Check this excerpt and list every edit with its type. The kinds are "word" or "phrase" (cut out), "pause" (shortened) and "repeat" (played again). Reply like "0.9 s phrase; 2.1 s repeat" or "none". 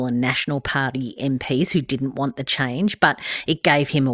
none